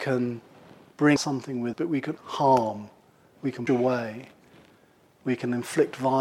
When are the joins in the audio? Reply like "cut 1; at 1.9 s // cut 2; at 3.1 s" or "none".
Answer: cut 1; at 1.2 s // cut 2; at 1.7 s // cut 3; at 2.2 s // cut 4; at 3.7 s

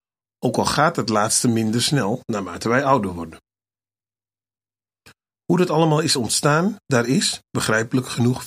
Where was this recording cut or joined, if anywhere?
none

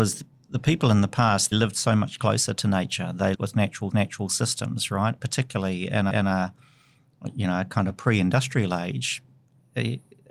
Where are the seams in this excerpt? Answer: cut 1; at 1.5 s // cut 2; at 3.3 s // cut 3; at 3.9 s // cut 4; at 6.1 s // cut 5; at 7.9 s

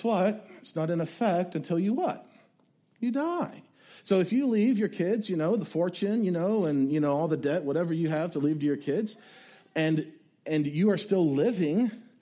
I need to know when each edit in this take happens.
none

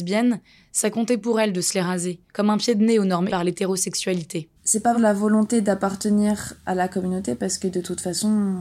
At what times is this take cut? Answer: cut 1; at 2.3 s // cut 2; at 3.3 s // cut 3; at 4.6 s // cut 4; at 4.9 s

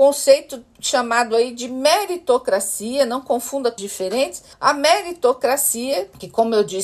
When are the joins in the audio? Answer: cut 1; at 3.8 s // cut 2; at 4.5 s

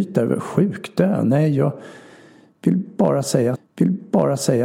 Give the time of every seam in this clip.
cut 1; at 3.6 s

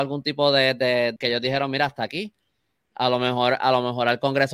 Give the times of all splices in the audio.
cut 1; at 1.2 s

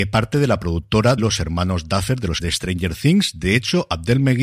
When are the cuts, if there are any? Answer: cut 1; at 1.2 s // cut 2; at 2.4 s

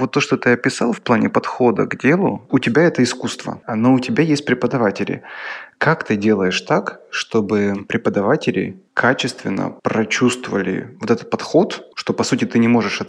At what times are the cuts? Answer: cut 1; at 2.5 s // cut 2; at 9.8 s

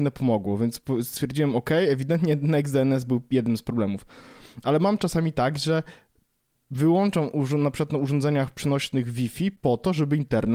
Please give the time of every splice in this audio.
none

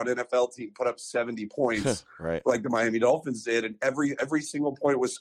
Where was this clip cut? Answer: none

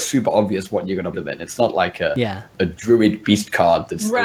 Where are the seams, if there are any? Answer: cut 1; at 1.1 s

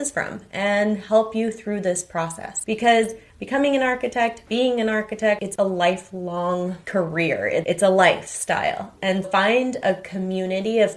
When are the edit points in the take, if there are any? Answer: cut 1; at 9.2 s

